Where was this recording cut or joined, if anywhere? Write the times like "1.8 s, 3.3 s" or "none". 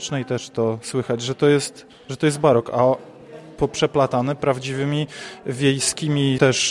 none